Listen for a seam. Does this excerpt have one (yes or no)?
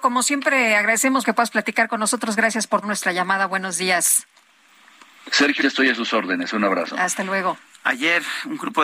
yes